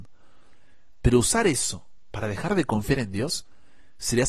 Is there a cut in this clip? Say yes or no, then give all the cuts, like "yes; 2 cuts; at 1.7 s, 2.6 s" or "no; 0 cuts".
no; 0 cuts